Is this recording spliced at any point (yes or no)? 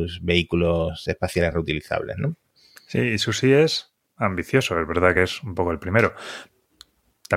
no